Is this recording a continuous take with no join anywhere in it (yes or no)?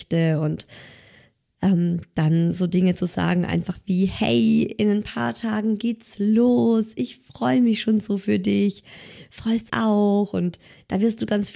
no